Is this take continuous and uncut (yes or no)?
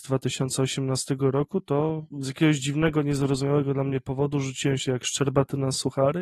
no